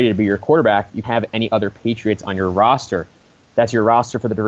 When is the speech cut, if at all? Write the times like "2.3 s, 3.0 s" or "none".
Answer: 1.0 s